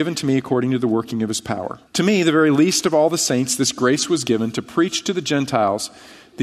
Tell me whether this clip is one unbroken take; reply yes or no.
no